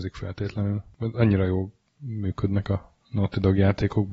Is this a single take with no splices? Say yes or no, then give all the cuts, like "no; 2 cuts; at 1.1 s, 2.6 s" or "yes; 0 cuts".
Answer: yes; 0 cuts